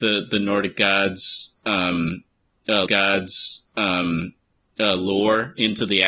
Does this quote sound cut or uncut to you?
cut